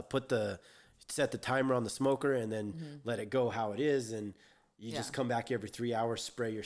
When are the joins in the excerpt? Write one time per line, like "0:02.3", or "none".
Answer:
none